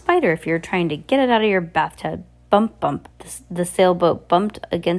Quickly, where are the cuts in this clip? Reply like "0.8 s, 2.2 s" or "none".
3.1 s